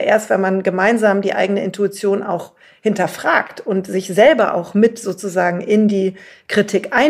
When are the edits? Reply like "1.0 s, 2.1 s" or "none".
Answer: none